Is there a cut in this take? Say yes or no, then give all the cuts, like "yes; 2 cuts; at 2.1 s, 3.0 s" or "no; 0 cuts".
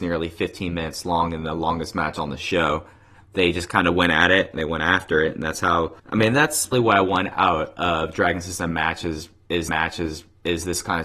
yes; 3 cuts; at 6.0 s, 6.7 s, 9.7 s